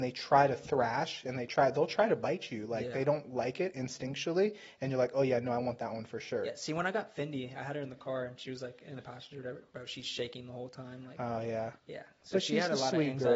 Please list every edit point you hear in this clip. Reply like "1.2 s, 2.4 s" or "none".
11.8 s